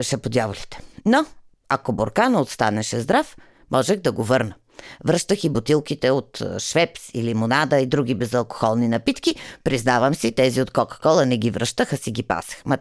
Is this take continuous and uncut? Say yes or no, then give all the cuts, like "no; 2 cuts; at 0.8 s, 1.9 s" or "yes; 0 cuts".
yes; 0 cuts